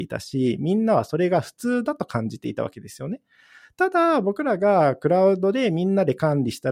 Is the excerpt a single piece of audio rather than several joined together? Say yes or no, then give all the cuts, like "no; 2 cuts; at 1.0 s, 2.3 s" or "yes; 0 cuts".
yes; 0 cuts